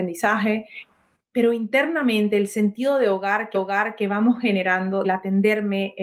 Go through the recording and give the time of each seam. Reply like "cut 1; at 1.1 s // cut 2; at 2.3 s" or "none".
cut 1; at 3.5 s // cut 2; at 5.0 s